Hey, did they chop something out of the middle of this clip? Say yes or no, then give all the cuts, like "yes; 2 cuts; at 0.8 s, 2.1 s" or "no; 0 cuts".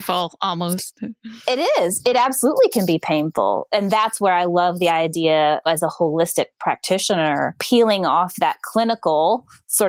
no; 0 cuts